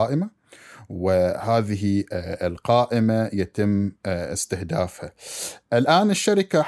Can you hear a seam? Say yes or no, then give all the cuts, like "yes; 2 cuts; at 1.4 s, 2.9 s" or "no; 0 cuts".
no; 0 cuts